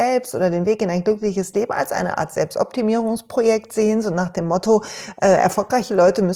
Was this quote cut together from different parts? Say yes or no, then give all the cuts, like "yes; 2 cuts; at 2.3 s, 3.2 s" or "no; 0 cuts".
no; 0 cuts